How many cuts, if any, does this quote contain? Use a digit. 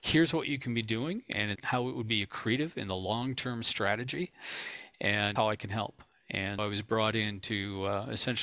3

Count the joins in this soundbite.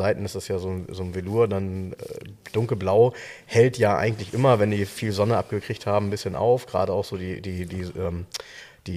0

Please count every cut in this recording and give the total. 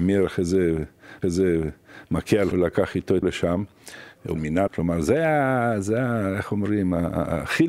5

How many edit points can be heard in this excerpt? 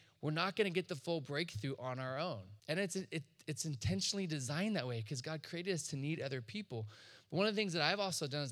1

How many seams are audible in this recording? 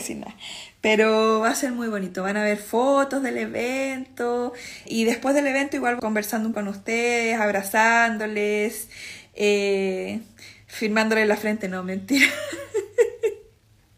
3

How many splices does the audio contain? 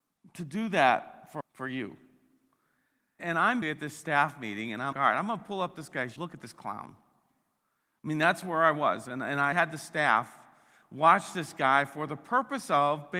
6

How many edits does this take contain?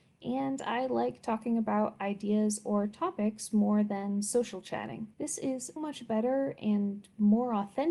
2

